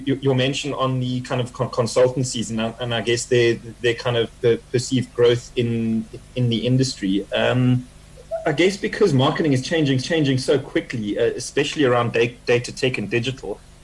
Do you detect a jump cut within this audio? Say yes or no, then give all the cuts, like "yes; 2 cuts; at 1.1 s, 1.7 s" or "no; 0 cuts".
yes; 1 cut; at 10.0 s